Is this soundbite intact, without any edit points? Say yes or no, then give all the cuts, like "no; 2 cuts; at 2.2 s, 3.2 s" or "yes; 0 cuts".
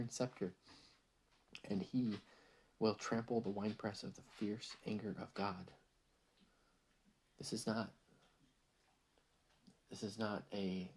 yes; 0 cuts